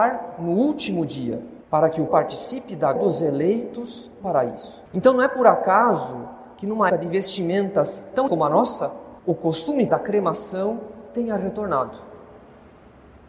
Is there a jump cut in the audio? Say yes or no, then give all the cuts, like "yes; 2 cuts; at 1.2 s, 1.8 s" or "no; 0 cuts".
yes; 9 cuts; at 1.6 s, 2.1 s, 3.0 s, 4.2 s, 4.9 s, 6.9 s, 8.3 s, 9.2 s, 9.9 s